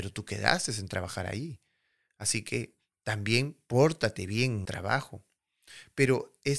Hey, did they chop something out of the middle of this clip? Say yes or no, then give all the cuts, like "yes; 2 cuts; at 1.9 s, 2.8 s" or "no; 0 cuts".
yes; 1 cut; at 4.6 s